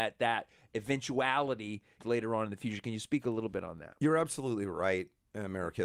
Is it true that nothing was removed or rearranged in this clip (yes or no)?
no